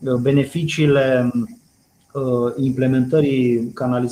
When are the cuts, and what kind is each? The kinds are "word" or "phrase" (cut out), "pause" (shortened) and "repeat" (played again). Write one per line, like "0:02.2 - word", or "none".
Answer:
none